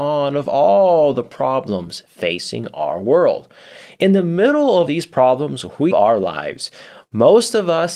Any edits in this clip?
yes; 2 cuts; at 4.9 s, 5.9 s

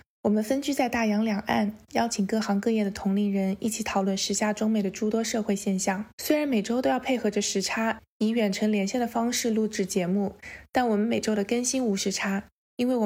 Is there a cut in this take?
yes; 1 cut; at 6.1 s

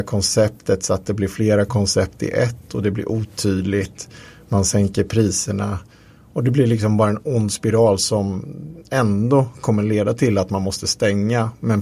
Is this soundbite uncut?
yes; 0 cuts

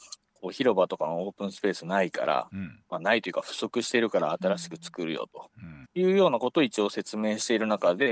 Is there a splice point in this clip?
yes; 1 cut; at 5.8 s

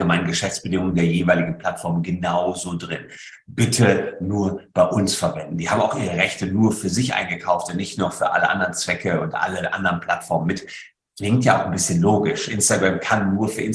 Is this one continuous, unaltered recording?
yes; 0 cuts

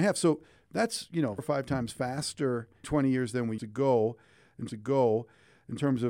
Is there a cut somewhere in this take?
yes; 4 cuts; at 1.4 s, 2.8 s, 3.6 s, 4.7 s

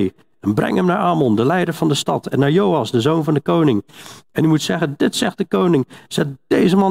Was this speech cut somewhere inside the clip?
no; 0 cuts

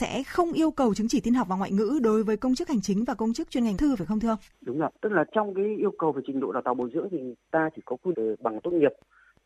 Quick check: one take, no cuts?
no; 4 cuts; at 3.8 s, 4.5 s, 4.9 s, 8.1 s

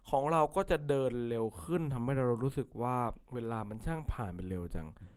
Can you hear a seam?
yes; 1 cut; at 3.2 s

